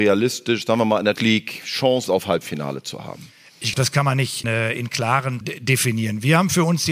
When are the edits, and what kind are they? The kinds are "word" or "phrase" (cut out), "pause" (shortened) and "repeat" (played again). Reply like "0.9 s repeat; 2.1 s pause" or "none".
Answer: 1.2 s word; 2.1 s word; 3.7 s word; 4.4 s word; 5.4 s word